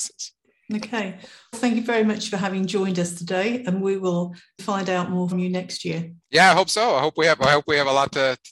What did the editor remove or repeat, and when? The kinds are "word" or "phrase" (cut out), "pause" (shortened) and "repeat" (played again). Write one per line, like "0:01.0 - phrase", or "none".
0:01.5 - word
0:04.6 - word
0:05.3 - word
0:06.2 - pause